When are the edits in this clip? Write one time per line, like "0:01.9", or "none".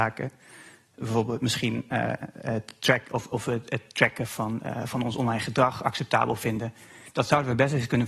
none

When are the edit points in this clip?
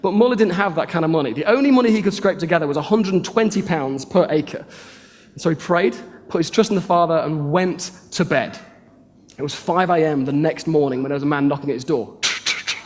none

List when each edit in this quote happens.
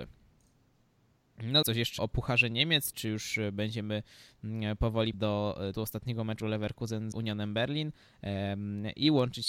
0:01.6
0:02.0
0:02.9
0:05.1
0:05.7
0:06.4
0:07.1

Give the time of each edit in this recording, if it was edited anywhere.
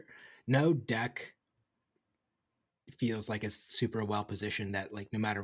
none

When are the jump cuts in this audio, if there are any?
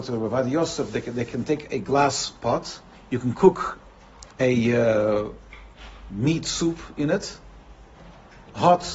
0:02.9
0:04.3

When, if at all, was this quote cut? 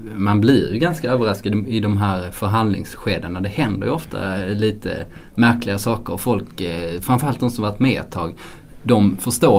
none

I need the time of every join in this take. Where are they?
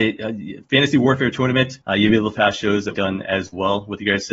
0:01.8
0:02.3
0:02.9

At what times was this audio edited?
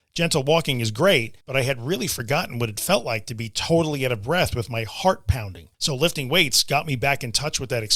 0:01.4
0:05.7

